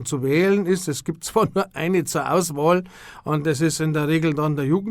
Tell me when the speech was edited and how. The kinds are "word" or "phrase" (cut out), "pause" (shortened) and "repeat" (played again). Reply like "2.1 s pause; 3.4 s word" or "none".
none